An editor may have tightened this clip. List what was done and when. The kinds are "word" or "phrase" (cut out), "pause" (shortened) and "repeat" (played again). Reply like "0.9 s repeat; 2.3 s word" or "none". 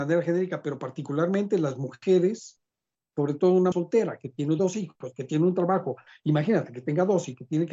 3.7 s phrase